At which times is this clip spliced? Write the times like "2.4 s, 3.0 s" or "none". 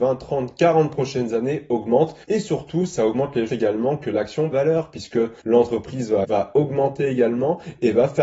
2.2 s, 3.5 s, 4.5 s, 5.4 s, 6.2 s